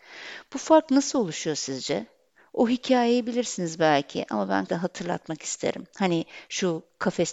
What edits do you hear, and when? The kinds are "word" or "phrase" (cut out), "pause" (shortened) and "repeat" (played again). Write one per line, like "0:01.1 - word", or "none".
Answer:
0:04.7 - word

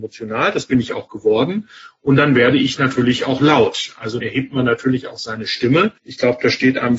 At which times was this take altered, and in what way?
0:04.2 - word
0:06.0 - pause

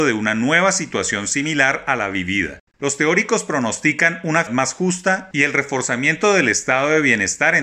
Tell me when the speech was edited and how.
0:02.7 - pause
0:04.5 - word

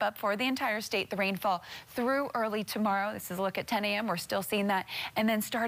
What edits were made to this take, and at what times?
none

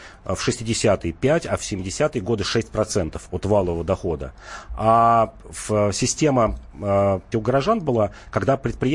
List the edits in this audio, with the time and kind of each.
0:07.3 - word

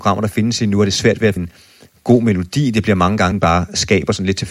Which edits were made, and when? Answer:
0:01.4 - word
0:03.3 - word

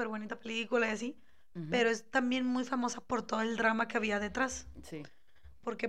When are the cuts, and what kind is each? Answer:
none

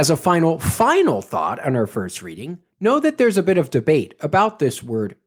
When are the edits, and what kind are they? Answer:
none

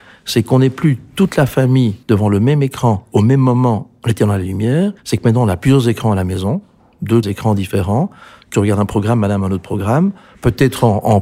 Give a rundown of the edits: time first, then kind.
0:02.0 - pause
0:05.0 - pause
0:07.2 - word
0:08.5 - word

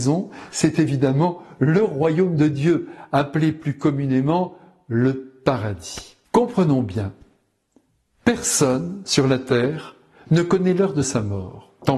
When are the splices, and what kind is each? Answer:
0:06.3 - pause

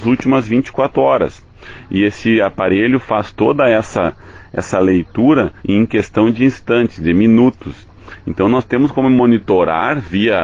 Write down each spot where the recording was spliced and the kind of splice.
0:05.6 - pause

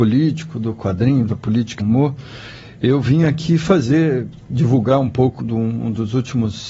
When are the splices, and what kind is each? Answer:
0:01.8 - word
0:05.4 - word

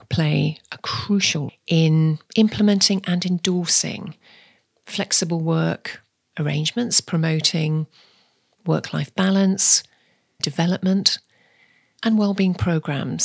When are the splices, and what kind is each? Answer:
0:01.5 - word
0:02.3 - pause
0:10.4 - phrase

